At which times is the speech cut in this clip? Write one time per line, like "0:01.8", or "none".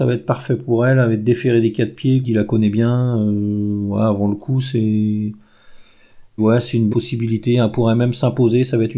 0:02.2
0:06.4
0:06.9